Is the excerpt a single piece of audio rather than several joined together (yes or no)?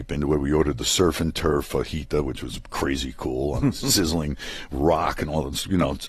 yes